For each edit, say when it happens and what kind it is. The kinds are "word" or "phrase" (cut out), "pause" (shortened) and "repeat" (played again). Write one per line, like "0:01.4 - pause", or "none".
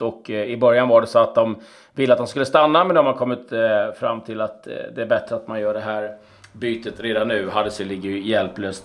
none